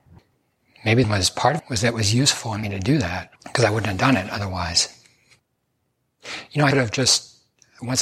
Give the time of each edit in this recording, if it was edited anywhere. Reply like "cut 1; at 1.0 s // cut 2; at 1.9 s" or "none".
cut 1; at 1.0 s // cut 2; at 1.6 s // cut 3; at 2.6 s // cut 4; at 3.4 s // cut 5; at 6.7 s